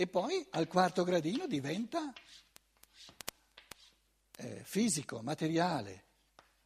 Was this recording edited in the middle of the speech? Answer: no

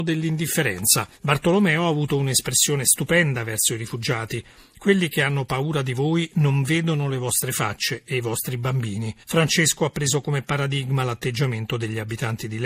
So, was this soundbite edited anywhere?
yes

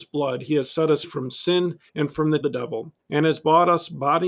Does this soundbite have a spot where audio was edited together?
yes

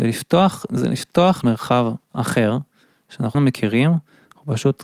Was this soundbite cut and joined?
yes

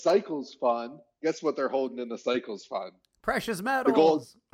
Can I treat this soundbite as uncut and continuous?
yes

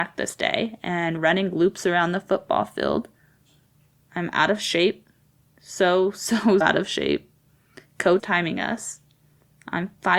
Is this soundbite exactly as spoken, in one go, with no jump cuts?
no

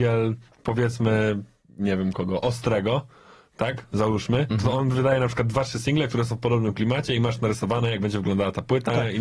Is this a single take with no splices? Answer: yes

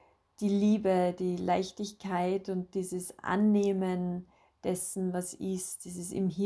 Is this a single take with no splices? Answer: yes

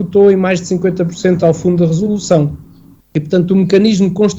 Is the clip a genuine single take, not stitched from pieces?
yes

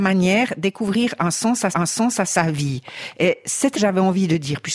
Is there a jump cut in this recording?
yes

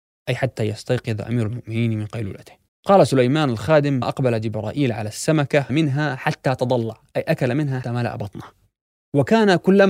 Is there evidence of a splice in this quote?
yes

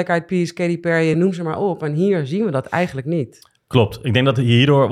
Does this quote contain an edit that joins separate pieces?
no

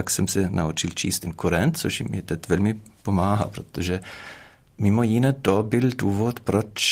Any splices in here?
no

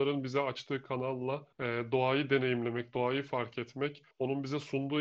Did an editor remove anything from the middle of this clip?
yes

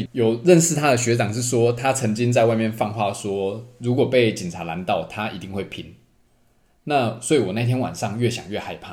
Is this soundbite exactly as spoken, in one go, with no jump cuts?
yes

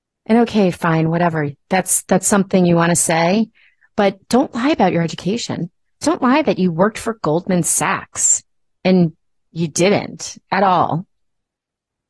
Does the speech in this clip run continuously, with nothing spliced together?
yes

